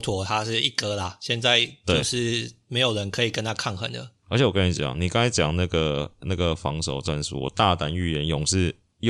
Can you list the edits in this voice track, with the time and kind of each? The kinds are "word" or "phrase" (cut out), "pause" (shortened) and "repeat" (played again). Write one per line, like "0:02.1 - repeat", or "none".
0:04.2 - pause